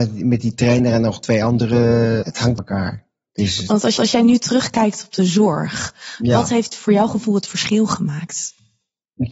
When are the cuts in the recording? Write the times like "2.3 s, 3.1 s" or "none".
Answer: 2.2 s, 2.6 s, 4.0 s